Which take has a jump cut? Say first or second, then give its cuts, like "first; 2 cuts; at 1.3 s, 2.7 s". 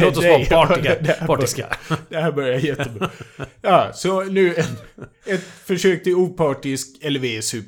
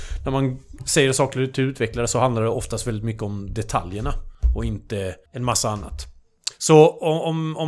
second; 2 cuts; at 5.3 s, 6.5 s